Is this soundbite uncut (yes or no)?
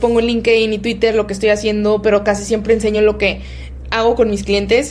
yes